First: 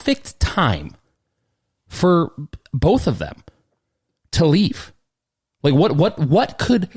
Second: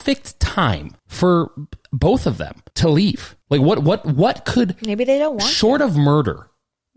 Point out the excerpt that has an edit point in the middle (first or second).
second